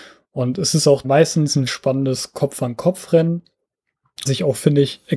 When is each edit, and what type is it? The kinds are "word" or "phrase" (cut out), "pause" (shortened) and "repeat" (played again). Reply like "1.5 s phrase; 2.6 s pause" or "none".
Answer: 1.0 s word; 1.7 s word; 4.3 s word